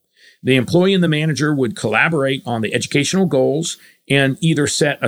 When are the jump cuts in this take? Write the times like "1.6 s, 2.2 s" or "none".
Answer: none